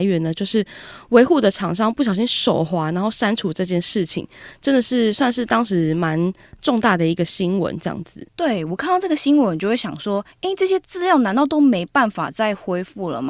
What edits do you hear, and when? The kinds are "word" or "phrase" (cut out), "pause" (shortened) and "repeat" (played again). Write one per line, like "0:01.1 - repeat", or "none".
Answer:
0:10.3 - pause